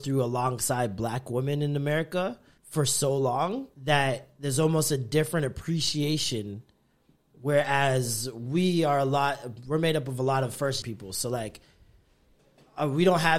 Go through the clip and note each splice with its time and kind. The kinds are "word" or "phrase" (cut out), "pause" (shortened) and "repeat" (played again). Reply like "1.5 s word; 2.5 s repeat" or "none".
2.6 s pause; 3.7 s pause; 10.8 s word